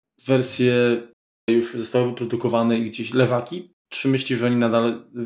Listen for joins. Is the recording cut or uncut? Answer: cut